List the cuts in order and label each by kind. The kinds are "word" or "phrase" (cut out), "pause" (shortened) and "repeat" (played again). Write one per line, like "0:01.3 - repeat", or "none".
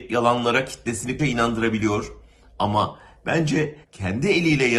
0:01.2 - word
0:03.8 - pause